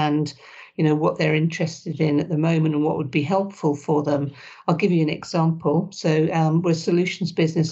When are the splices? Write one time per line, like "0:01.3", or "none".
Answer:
none